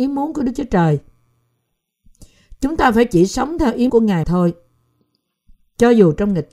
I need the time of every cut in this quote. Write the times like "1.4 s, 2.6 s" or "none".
3.9 s, 4.2 s